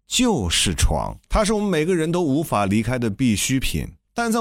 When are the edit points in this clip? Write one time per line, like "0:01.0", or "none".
0:01.2